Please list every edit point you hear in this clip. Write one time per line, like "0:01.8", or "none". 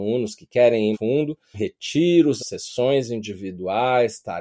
0:00.9
0:01.5
0:02.4